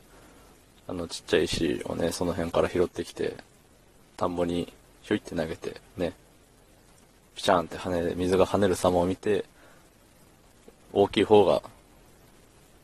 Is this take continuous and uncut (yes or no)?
no